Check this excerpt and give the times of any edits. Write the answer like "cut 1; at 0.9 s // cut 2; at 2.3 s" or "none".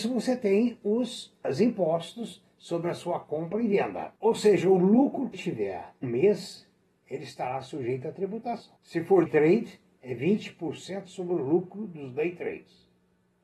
cut 1; at 1.4 s // cut 2; at 4.2 s // cut 3; at 5.3 s // cut 4; at 6.0 s // cut 5; at 8.8 s // cut 6; at 9.3 s